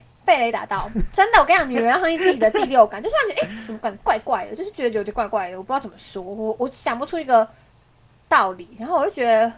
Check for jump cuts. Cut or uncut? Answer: uncut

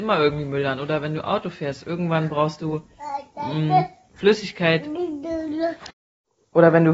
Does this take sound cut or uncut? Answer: uncut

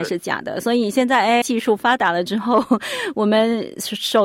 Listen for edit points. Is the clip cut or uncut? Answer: cut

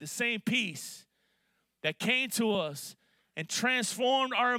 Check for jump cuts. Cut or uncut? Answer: uncut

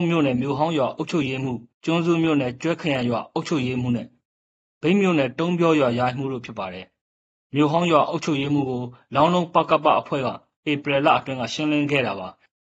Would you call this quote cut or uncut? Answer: cut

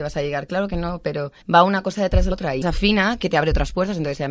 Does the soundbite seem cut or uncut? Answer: cut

